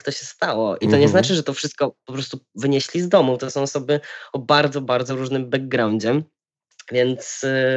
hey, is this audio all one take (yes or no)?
yes